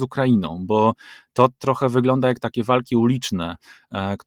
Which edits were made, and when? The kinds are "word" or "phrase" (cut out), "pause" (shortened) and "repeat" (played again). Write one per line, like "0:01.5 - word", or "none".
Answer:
none